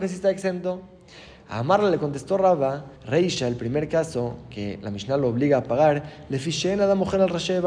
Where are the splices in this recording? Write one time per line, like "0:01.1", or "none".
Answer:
0:02.9